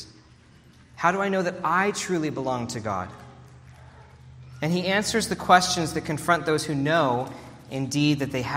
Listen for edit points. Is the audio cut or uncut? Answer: uncut